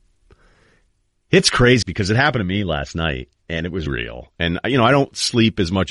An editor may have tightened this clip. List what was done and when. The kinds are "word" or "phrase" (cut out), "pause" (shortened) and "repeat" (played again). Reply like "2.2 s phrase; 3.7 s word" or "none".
1.8 s phrase; 3.9 s word

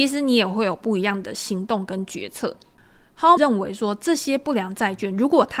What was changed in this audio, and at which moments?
3.4 s word

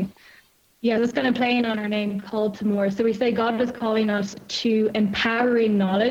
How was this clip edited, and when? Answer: 1.0 s word

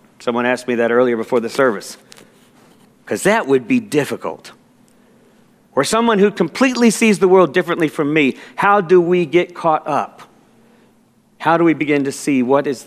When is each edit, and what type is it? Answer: none

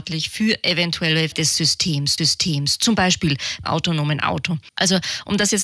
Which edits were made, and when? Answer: 1.3 s word; 2.2 s repeat; 3.6 s word; 4.7 s pause

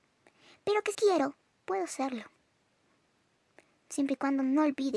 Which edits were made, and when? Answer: 0.9 s word

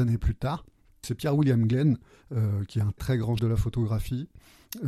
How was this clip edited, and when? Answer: 1.0 s word; 3.0 s word; 3.4 s word

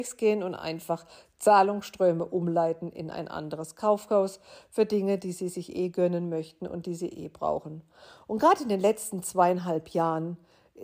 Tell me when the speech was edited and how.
none

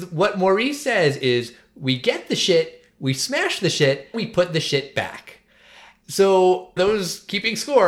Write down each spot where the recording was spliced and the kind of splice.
4.1 s word; 6.8 s word

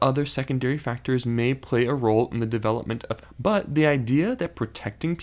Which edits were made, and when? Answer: 3.2 s word

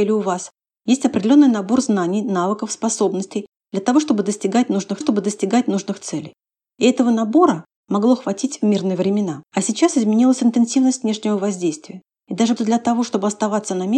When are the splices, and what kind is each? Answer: 5.0 s repeat; 9.5 s pause; 12.6 s word

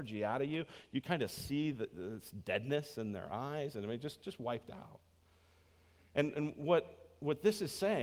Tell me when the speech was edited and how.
none

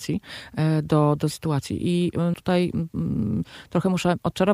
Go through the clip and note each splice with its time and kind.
1.3 s word; 2.3 s word

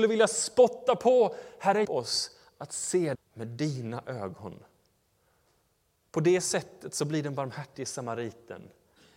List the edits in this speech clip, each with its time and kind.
1.8 s word; 3.1 s word

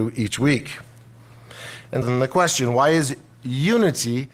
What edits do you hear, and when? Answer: 2.0 s word

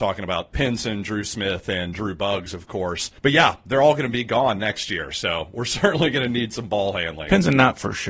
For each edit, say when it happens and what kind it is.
3.2 s pause

